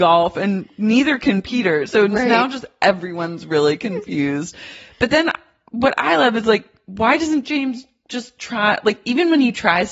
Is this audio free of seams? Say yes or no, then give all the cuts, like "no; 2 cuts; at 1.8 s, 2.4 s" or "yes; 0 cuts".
yes; 0 cuts